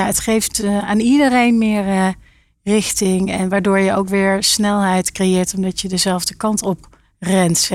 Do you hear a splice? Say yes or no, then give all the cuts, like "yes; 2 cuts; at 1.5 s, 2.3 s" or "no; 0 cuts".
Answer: no; 0 cuts